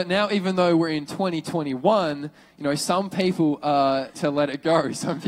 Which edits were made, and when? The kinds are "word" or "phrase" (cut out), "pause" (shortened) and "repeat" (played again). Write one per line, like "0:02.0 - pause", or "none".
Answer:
0:04.1 - word

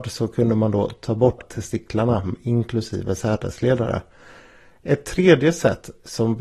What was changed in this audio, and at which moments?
0:01.4 - word

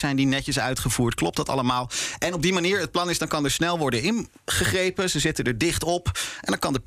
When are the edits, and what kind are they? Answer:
none

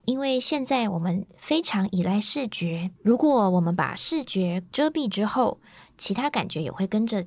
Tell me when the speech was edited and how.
0:03.0 - pause

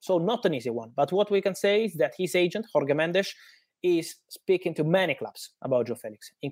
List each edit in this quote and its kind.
none

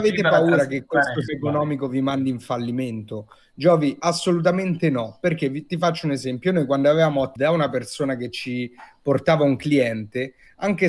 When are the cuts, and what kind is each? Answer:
0:01.3 - word
0:07.4 - word

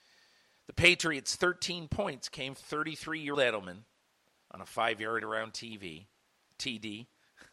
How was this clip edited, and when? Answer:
0:02.6 - word
0:03.3 - word
0:05.2 - word

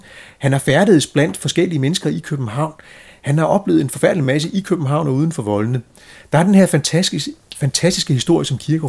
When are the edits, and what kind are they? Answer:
none

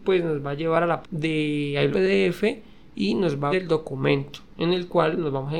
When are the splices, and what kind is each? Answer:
0:01.0 - word
0:01.9 - word
0:03.5 - word

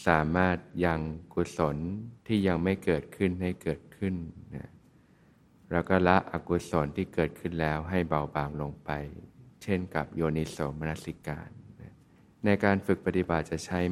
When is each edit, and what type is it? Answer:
0:02.2 - pause
0:12.2 - pause

